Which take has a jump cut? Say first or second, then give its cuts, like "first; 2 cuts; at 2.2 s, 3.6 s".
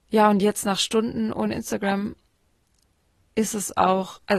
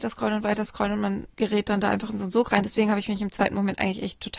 second; 1 cut; at 1.3 s